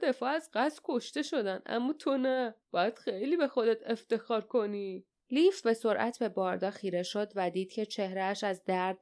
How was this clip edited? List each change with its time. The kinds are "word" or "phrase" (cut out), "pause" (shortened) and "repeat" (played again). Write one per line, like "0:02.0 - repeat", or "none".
0:02.6 - pause
0:05.1 - pause